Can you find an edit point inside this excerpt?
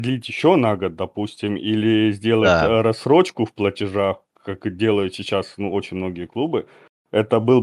no; 0 cuts

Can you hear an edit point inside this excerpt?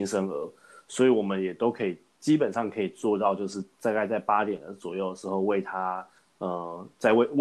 no; 0 cuts

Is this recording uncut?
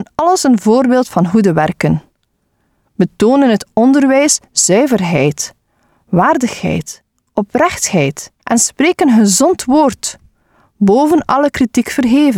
no; 1 cut; at 8.4 s

